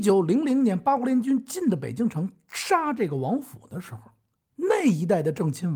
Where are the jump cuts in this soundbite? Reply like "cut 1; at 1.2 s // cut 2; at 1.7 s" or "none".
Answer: none